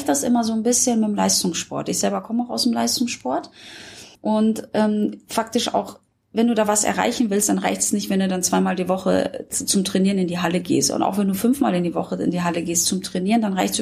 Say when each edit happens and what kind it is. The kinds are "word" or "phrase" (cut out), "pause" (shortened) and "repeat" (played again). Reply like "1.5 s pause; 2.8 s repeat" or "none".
4.1 s pause